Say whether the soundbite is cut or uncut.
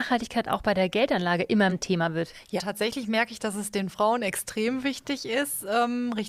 cut